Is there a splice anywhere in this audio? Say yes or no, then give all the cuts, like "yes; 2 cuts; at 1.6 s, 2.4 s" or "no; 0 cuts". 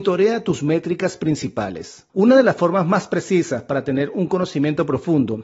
yes; 1 cut; at 2.1 s